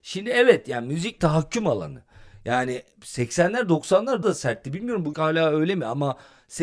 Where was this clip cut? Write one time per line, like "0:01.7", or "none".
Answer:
0:01.2
0:04.2
0:05.1